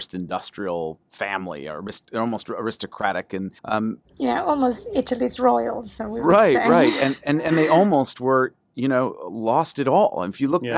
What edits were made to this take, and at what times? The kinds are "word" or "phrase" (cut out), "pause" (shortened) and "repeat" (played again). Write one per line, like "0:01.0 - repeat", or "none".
0:03.6 - pause